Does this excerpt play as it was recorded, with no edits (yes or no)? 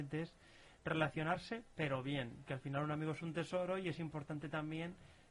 no